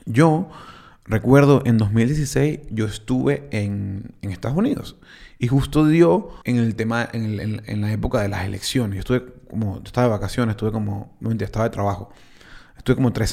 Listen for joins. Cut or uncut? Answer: cut